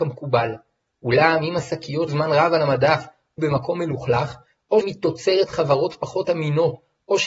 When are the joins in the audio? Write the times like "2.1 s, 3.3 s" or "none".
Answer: 2.1 s, 3.4 s, 4.8 s